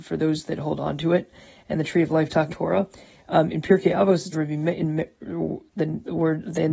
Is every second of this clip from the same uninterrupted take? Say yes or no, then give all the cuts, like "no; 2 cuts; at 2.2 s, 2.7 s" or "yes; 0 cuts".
no; 2 cuts; at 2.5 s, 4.3 s